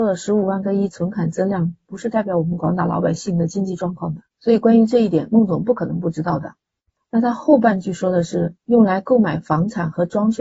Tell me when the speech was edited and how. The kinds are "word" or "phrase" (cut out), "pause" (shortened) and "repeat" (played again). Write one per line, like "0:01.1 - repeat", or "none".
0:04.3 - pause
0:08.6 - pause